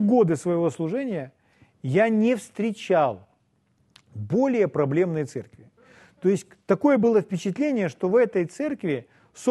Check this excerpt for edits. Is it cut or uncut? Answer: uncut